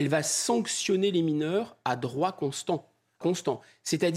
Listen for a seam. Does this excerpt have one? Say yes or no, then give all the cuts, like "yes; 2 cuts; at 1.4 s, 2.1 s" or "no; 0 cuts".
yes; 1 cut; at 3.2 s